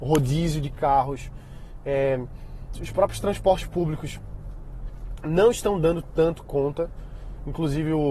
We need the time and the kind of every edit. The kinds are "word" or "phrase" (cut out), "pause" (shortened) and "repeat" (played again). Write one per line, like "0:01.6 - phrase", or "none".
0:02.8 - word

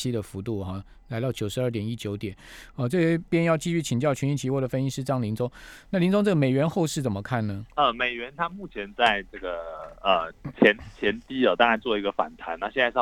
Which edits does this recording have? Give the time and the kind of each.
0:03.3 - pause
0:07.7 - pause

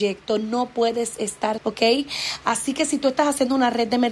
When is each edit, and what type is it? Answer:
0:01.6 - word

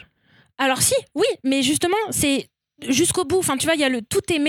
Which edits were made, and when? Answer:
none

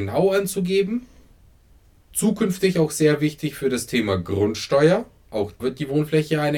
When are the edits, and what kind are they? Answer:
0:05.6 - word

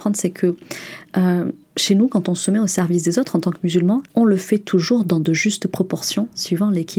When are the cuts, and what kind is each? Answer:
0:01.6 - pause
0:04.1 - pause

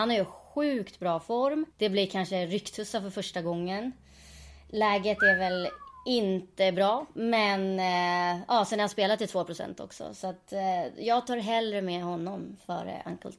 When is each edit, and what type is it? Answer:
0:01.7 - pause

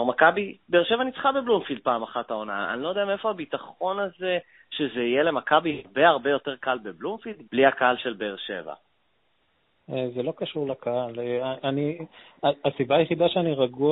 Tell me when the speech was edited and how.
0:07.5 - word

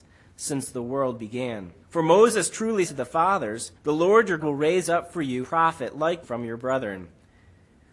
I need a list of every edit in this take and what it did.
0:01.8 - pause
0:02.9 - word
0:03.8 - pause
0:04.4 - word
0:05.4 - word
0:06.2 - word

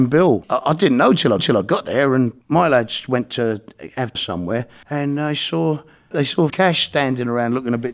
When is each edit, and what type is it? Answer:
0:01.4 - repeat
0:04.1 - word
0:06.5 - word

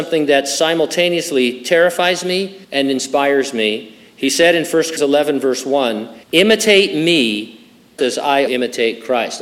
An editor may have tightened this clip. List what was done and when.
0:02.6 - pause
0:05.0 - word
0:06.2 - pause
0:08.0 - word
0:08.5 - word

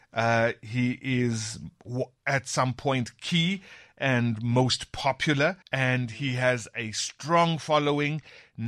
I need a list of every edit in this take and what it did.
0:05.6 - pause

